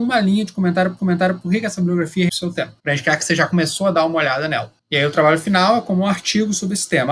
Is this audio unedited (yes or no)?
no